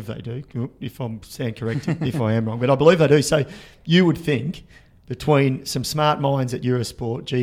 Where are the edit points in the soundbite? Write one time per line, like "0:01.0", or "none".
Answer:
none